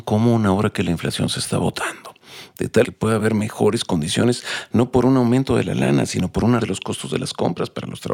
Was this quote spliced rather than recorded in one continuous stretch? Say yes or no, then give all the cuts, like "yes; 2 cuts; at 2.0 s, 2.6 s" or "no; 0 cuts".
yes; 2 cuts; at 2.8 s, 6.6 s